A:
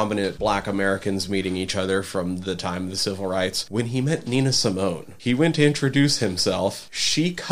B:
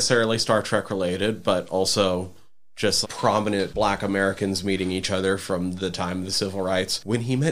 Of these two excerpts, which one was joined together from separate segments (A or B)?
B